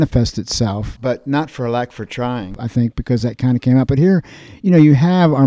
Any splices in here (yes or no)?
no